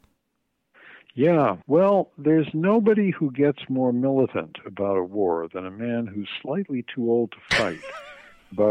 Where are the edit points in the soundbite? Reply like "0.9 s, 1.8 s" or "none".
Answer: 1.6 s